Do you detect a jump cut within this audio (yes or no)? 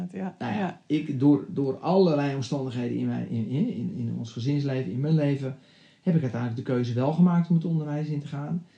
no